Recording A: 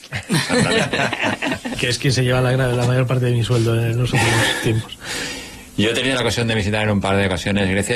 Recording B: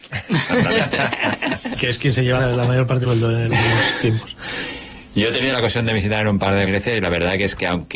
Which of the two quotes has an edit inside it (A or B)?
B